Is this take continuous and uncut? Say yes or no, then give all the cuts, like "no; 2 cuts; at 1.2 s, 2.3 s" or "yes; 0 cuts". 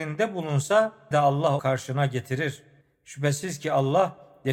no; 3 cuts; at 1.1 s, 1.6 s, 2.8 s